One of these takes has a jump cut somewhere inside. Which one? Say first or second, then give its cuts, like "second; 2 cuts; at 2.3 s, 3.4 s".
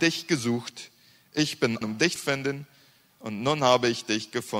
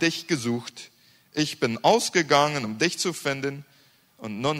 first; 2 cuts; at 1.8 s, 2.2 s